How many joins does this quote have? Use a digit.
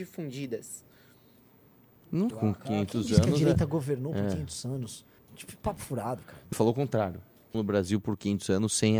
4